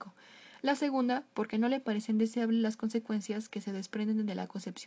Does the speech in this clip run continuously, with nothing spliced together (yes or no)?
yes